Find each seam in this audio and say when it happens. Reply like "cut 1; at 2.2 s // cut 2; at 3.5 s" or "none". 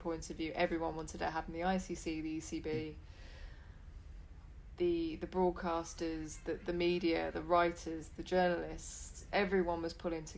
none